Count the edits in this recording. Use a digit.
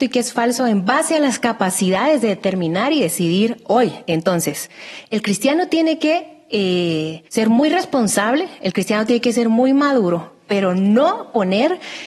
1